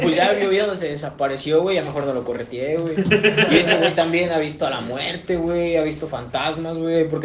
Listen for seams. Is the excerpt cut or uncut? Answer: uncut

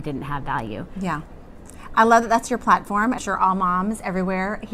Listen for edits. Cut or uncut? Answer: cut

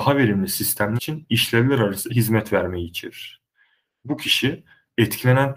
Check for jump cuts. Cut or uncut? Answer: cut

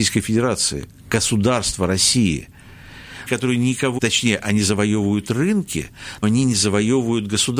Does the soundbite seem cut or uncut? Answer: cut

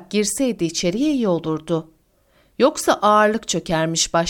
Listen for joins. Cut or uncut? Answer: uncut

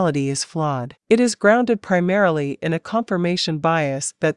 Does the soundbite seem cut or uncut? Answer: cut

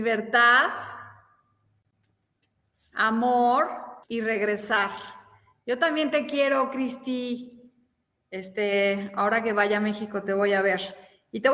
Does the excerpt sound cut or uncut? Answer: cut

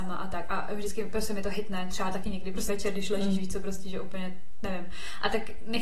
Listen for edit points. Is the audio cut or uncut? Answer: cut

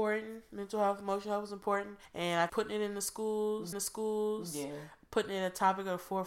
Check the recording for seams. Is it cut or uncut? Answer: cut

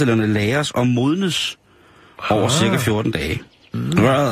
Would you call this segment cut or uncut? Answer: uncut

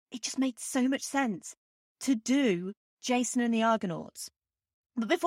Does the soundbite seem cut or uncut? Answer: uncut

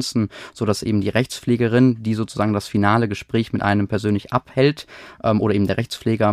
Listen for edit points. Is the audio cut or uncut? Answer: uncut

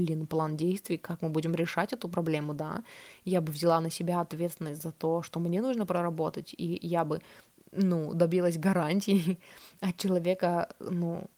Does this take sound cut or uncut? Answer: uncut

